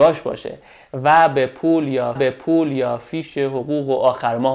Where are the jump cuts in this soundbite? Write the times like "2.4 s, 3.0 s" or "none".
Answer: 2.2 s